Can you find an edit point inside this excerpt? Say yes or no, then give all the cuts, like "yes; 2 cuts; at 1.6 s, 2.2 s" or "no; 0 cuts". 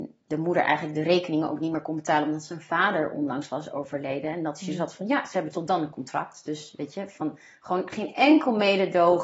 no; 0 cuts